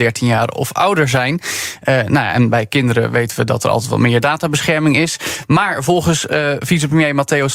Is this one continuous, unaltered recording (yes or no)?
yes